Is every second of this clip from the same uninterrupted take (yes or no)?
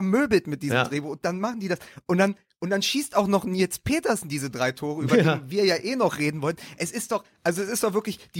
yes